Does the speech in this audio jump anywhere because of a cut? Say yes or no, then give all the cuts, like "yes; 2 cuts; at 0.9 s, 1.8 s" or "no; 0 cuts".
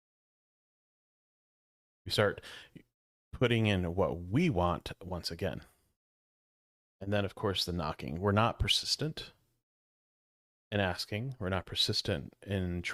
no; 0 cuts